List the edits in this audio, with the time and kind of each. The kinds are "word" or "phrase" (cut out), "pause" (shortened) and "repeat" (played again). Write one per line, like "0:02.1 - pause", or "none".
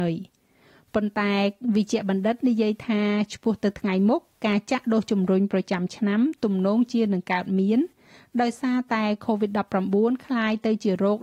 none